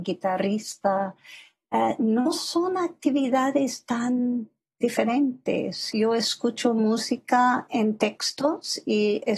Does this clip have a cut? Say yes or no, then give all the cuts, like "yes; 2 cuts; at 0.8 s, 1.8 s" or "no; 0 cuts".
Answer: no; 0 cuts